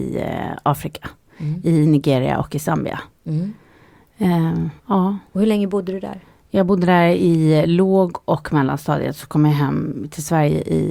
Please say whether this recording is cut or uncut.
cut